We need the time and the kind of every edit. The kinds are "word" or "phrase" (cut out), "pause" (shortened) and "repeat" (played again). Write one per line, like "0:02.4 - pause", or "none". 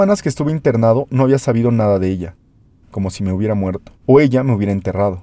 0:04.0 - pause